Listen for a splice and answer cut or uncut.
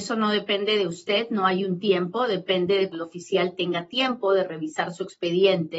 cut